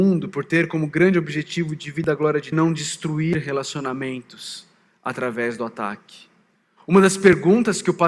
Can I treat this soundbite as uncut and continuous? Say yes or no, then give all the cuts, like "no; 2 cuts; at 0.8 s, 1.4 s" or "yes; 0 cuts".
no; 1 cut; at 2.5 s